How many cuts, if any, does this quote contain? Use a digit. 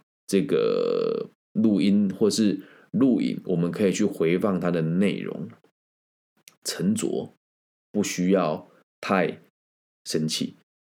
0